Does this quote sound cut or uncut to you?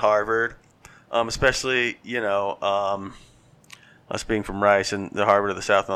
uncut